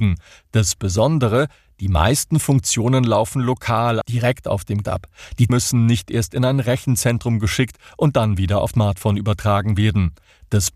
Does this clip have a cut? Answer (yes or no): yes